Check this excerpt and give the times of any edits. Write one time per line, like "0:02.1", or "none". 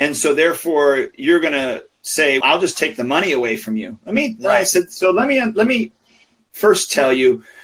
0:02.4